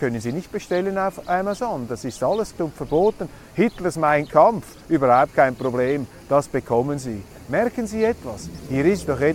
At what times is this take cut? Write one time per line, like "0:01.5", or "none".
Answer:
0:02.5